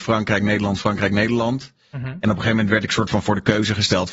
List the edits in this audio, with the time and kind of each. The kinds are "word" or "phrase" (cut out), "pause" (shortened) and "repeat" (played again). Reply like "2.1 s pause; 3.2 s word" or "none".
none